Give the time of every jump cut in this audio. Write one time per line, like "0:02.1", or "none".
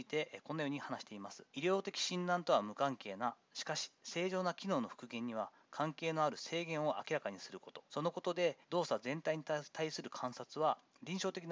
0:01.5
0:07.9
0:08.6